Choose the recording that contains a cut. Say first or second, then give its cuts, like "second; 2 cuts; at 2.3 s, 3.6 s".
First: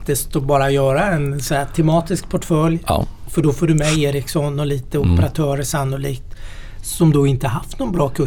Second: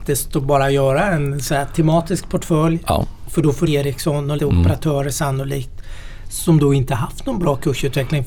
second; 2 cuts; at 3.7 s, 4.4 s